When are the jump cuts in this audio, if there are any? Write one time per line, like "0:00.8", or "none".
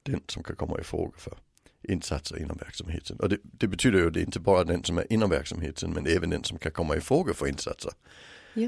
none